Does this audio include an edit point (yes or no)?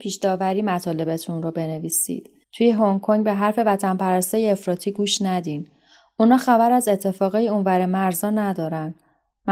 yes